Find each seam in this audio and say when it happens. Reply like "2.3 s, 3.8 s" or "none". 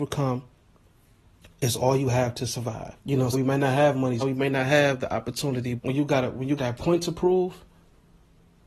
3.0 s, 3.3 s, 4.2 s, 5.8 s, 6.6 s